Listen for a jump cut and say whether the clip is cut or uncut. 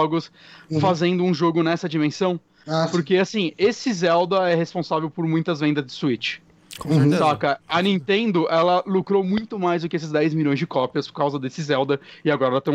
uncut